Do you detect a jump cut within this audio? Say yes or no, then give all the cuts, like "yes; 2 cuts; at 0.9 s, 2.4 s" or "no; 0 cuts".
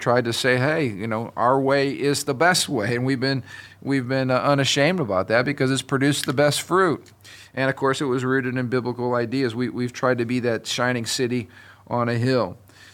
no; 0 cuts